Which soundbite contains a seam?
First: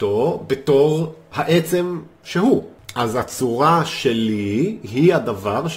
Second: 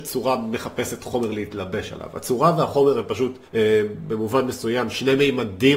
second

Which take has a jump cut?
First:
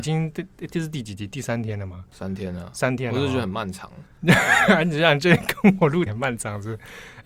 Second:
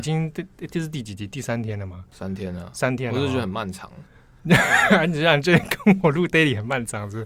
first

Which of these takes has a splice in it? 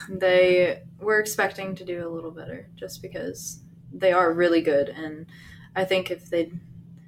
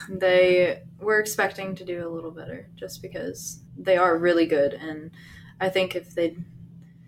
second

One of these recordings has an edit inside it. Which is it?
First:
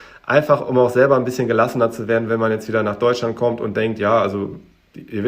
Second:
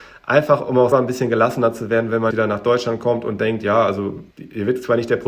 second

